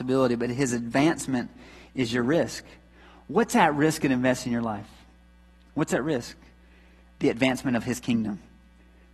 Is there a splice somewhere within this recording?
no; 0 cuts

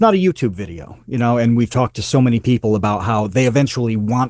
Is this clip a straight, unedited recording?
yes; 0 cuts

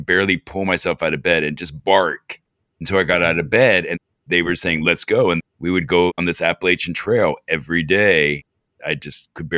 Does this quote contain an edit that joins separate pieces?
no; 0 cuts

